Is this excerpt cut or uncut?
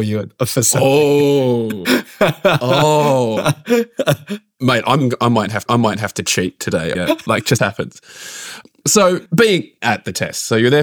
cut